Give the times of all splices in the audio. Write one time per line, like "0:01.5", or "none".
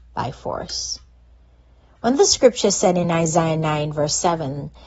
none